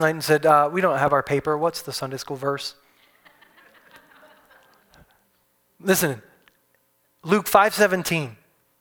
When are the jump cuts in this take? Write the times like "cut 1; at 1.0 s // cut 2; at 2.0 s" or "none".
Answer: none